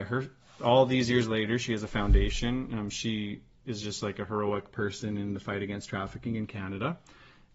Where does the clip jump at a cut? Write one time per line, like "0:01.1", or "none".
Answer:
none